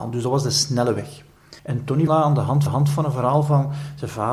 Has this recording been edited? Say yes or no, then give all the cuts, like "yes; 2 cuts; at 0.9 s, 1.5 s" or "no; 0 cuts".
yes; 3 cuts; at 1.6 s, 2.1 s, 2.7 s